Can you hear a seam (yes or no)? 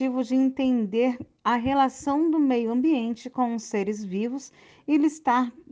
no